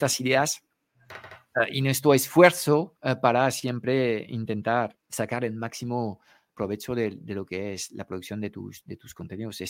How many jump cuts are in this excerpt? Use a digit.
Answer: 3